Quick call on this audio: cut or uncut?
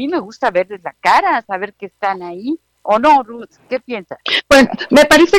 uncut